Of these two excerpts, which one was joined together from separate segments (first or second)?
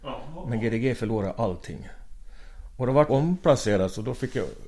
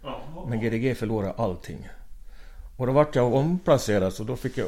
first